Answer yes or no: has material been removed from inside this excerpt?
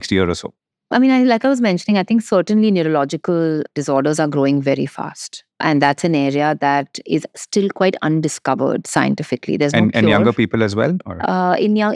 yes